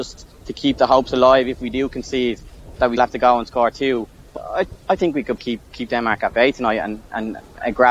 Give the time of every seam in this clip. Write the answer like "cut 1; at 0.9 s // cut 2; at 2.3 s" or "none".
cut 1; at 3.0 s // cut 2; at 4.4 s // cut 3; at 5.4 s